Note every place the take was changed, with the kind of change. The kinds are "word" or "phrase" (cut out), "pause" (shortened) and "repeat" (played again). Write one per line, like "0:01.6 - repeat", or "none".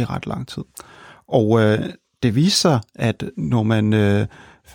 none